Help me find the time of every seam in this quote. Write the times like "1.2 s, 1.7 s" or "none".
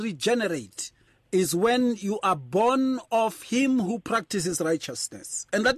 1.1 s